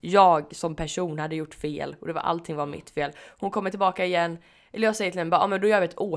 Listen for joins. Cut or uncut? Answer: uncut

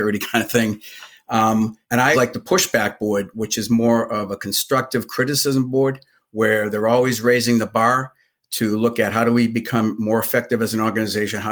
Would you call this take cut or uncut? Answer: cut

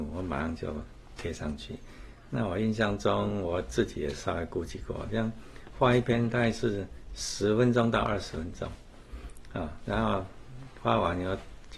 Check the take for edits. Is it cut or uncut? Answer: uncut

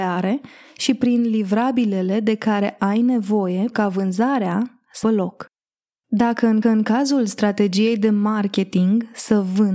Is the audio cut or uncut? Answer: cut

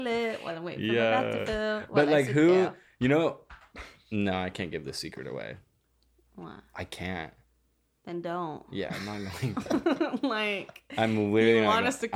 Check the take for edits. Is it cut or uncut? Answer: uncut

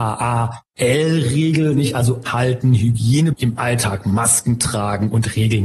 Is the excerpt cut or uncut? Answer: cut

